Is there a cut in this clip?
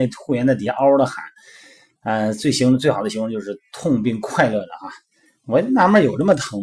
no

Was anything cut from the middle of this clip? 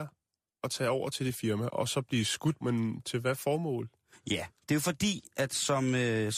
yes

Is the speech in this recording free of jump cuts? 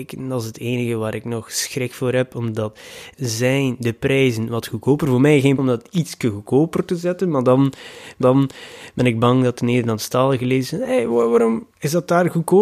no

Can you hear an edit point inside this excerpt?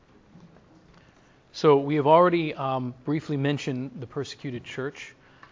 no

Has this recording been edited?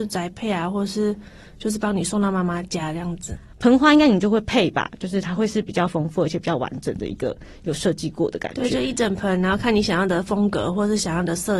no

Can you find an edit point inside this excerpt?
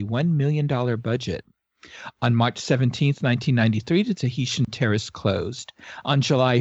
no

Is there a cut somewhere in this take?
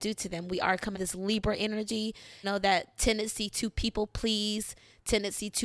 yes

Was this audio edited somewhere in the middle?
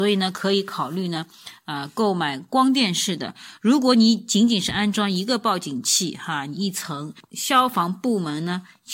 no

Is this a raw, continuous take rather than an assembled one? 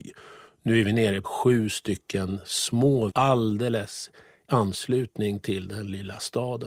no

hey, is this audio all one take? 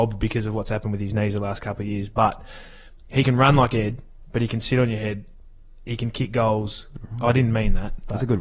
yes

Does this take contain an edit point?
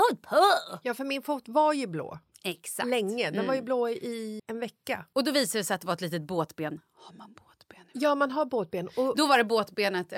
yes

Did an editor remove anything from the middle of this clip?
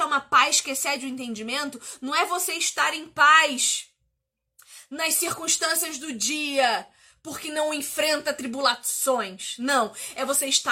no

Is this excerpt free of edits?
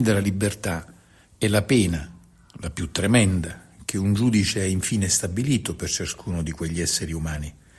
yes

